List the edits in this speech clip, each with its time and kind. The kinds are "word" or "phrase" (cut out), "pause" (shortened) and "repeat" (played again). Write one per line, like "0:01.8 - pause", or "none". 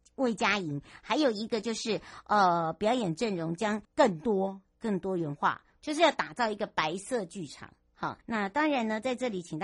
0:03.8 - pause
0:05.8 - word
0:08.2 - pause